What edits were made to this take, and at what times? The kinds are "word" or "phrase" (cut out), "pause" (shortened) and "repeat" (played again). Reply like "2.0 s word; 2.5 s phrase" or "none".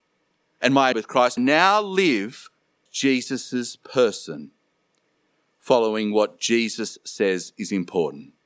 0.9 s phrase; 1.4 s phrase; 2.9 s word